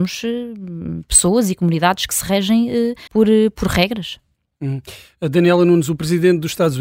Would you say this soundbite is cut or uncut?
cut